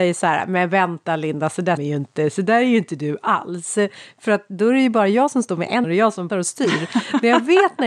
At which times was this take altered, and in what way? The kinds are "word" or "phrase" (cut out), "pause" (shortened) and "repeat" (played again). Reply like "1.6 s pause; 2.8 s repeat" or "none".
1.8 s word; 5.8 s word; 6.3 s word